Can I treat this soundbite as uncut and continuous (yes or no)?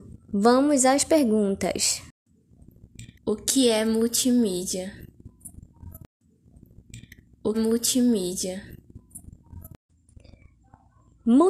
no